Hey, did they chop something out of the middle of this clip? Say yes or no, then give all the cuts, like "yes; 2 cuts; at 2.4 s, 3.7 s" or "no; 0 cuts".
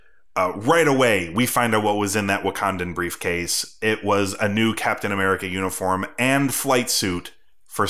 no; 0 cuts